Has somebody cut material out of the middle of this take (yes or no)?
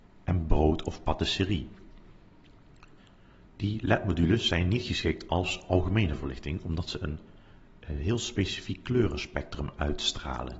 no